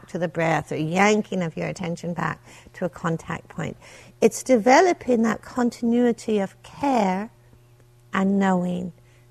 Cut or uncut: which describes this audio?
uncut